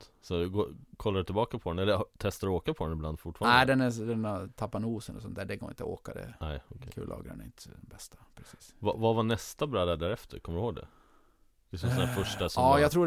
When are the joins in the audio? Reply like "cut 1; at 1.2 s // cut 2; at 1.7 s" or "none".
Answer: none